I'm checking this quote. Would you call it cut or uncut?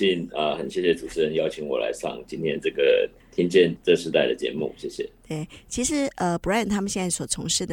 uncut